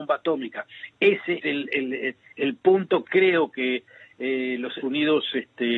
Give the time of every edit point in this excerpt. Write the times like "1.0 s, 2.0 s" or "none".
1.4 s, 3.0 s, 4.8 s